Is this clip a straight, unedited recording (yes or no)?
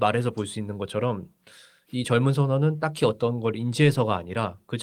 yes